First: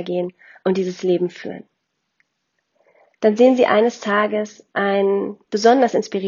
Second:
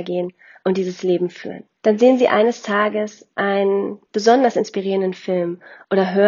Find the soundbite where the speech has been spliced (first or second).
second